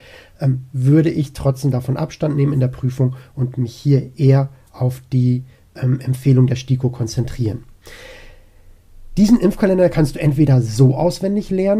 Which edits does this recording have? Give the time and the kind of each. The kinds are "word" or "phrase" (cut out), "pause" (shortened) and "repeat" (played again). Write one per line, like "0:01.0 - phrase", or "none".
none